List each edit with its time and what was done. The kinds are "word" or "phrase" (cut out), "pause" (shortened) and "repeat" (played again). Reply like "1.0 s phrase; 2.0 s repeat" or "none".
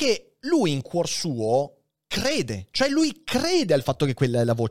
none